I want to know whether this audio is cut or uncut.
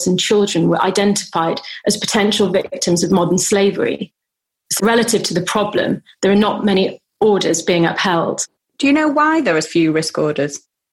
cut